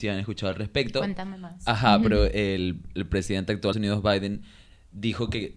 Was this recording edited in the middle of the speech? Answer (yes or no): yes